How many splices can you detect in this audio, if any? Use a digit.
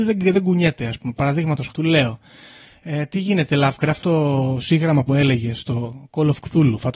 3